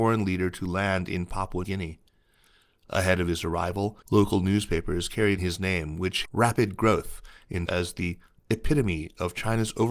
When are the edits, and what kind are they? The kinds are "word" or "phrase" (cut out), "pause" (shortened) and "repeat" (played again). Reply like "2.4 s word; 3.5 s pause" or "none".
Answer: 1.6 s word; 4.0 s pause; 5.4 s phrase; 6.2 s phrase; 7.7 s word